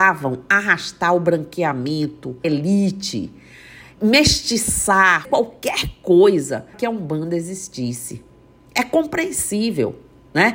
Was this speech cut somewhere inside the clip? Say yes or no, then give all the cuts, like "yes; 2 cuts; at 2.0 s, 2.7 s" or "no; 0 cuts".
yes; 4 cuts; at 2.4 s, 4.0 s, 5.2 s, 6.7 s